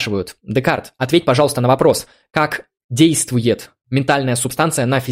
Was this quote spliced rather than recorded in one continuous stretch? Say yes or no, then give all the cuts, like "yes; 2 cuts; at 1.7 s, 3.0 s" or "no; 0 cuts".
no; 0 cuts